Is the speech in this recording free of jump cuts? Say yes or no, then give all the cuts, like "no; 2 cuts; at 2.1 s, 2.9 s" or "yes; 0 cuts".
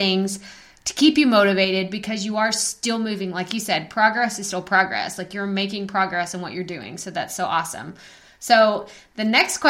yes; 0 cuts